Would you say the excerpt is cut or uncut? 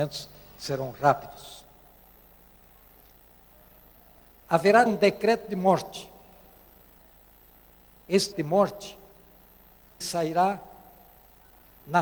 cut